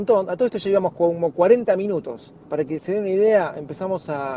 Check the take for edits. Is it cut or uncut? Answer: cut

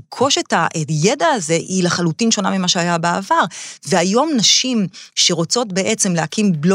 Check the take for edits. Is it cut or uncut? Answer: uncut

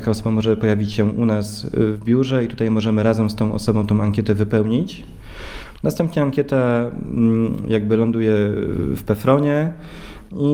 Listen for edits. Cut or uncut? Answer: uncut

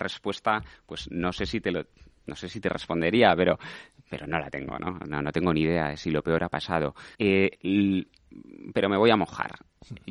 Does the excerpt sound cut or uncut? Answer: cut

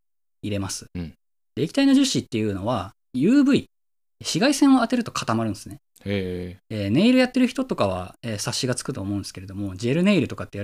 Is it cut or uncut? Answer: uncut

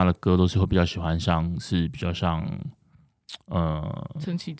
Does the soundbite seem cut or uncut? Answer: cut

